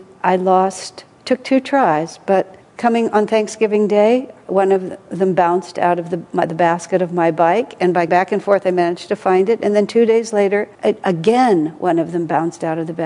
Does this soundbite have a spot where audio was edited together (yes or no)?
yes